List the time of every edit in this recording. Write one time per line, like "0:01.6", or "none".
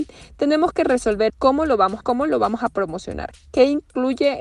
0:01.3
0:02.0